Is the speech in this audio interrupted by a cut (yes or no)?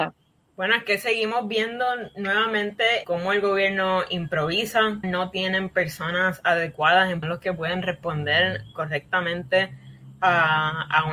yes